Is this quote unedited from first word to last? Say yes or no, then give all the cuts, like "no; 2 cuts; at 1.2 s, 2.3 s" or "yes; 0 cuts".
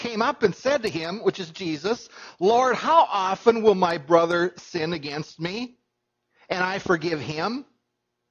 yes; 0 cuts